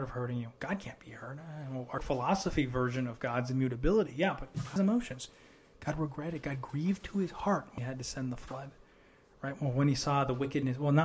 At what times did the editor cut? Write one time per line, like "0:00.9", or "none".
0:02.0
0:04.8
0:07.8